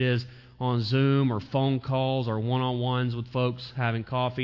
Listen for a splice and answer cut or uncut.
uncut